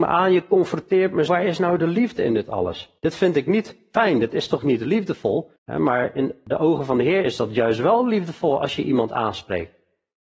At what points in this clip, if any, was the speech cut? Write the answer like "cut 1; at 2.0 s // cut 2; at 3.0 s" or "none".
cut 1; at 1.3 s // cut 2; at 3.0 s // cut 3; at 5.6 s